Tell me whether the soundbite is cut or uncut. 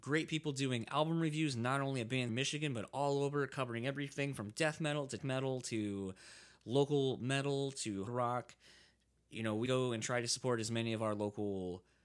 cut